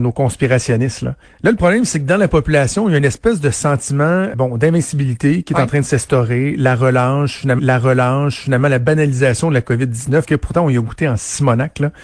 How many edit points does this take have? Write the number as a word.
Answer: four